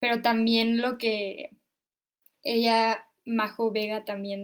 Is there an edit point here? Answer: no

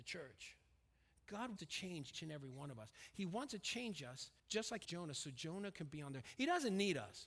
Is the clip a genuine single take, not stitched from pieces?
no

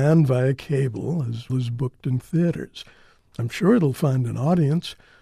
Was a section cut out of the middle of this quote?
yes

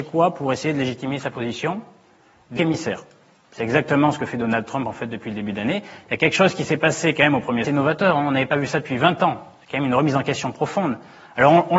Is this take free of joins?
no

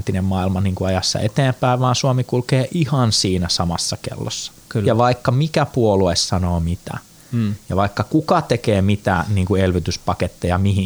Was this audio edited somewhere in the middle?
no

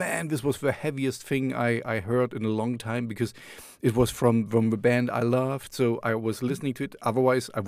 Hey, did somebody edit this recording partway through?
no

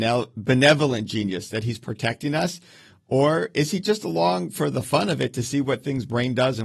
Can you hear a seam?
no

